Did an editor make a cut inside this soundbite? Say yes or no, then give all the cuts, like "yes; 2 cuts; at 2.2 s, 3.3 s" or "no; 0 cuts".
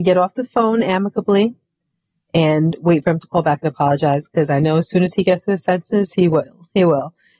no; 0 cuts